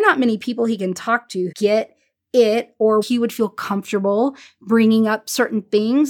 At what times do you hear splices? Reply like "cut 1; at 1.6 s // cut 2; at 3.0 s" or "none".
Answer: cut 1; at 1.5 s // cut 2; at 3.0 s

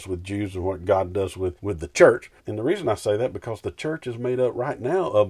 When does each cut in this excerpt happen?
cut 1; at 1.6 s // cut 2; at 2.4 s

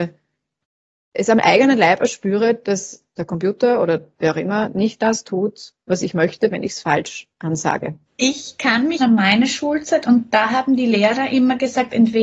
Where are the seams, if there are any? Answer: cut 1; at 3.1 s // cut 2; at 8.1 s // cut 3; at 9.0 s

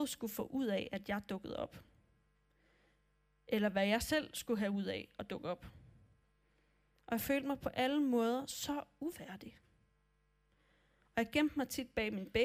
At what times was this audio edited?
none

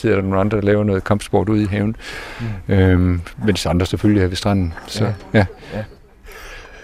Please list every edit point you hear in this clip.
none

